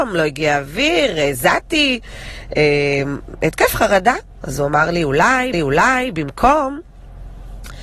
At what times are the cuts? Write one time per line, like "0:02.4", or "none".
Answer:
0:05.5